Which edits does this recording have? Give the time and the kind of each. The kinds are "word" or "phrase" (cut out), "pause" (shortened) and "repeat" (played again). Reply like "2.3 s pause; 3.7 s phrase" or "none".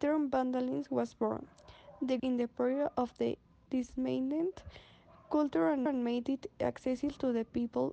2.2 s word; 3.7 s word; 5.9 s repeat